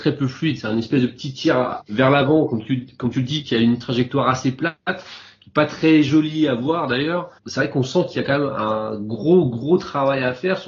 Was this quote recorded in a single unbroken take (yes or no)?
no